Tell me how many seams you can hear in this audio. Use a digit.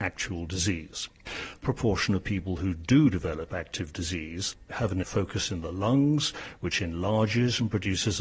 2